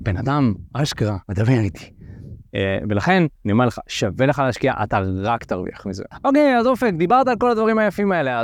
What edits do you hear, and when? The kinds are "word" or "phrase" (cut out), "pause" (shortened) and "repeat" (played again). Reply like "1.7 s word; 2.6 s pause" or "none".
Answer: 1.2 s pause; 3.4 s pause